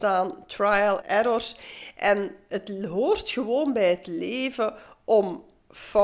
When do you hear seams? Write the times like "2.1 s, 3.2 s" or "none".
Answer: 1.0 s